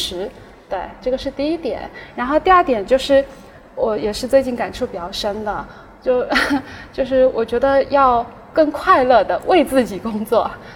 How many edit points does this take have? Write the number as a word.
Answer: zero